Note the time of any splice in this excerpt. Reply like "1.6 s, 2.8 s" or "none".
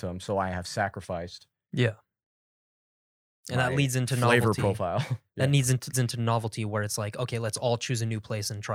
3.6 s, 5.9 s

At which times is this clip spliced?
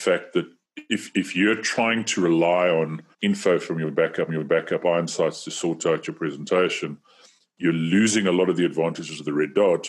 3.1 s, 4.3 s

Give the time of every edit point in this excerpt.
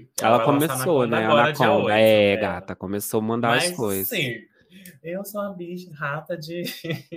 5.9 s

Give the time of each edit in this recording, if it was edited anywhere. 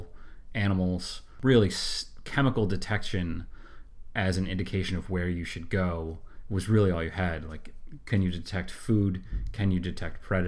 none

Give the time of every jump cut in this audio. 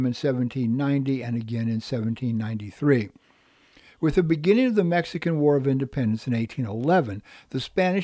none

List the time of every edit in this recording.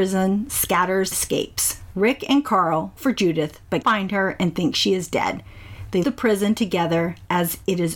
1.1 s, 3.0 s, 3.8 s, 6.0 s

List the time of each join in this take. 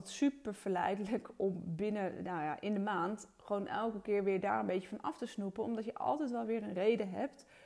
none

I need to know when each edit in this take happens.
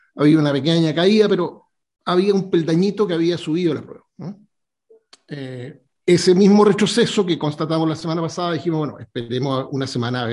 none

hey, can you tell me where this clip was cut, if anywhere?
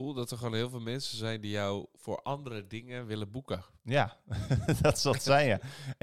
none

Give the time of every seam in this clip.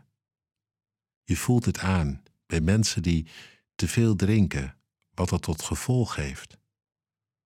none

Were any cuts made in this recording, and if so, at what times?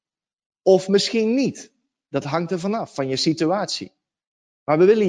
none

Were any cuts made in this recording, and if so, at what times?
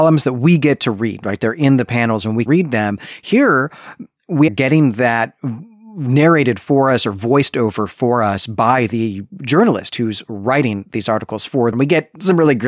2.5 s, 4.5 s, 11.7 s

